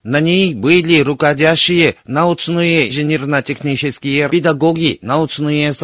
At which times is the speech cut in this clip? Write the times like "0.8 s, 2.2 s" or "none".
2.9 s, 4.3 s

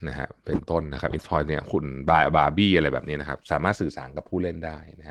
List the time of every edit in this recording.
1.2 s

